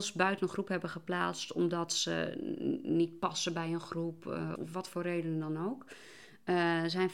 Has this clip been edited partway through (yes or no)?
yes